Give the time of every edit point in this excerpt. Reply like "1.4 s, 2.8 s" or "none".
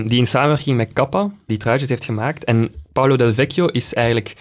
1.5 s